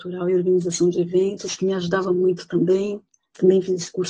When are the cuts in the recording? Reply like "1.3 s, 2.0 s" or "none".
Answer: none